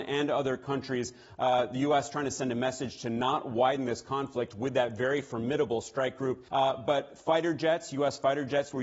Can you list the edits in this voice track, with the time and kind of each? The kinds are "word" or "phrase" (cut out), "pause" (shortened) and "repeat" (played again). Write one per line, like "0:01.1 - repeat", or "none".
0:06.5 - pause